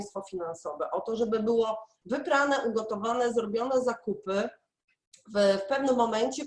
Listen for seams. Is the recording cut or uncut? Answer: uncut